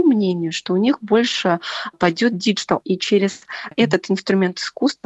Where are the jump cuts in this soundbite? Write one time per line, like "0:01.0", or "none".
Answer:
0:01.9
0:02.8
0:03.7

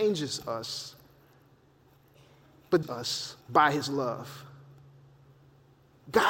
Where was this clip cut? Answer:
0:02.8
0:03.4

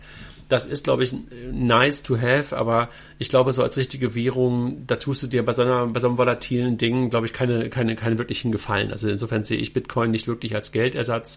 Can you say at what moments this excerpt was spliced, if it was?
none

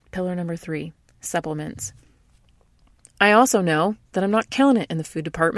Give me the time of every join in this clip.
none

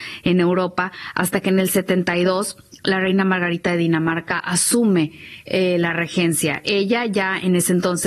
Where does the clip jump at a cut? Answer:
none

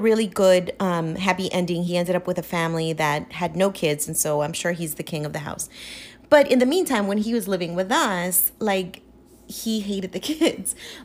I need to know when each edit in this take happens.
none

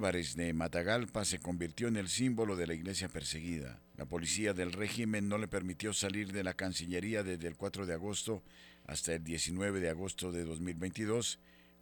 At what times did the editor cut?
0:03.9

